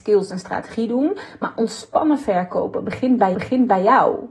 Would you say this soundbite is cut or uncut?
cut